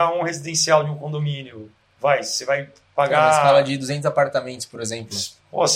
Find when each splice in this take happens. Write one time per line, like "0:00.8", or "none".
none